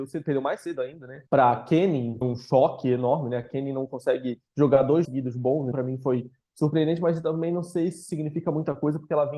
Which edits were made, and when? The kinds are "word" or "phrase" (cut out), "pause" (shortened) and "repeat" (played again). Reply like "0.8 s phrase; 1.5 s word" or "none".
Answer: 1.3 s pause; 2.2 s word; 4.5 s pause; 5.0 s word; 5.7 s word